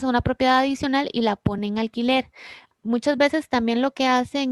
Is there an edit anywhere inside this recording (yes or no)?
no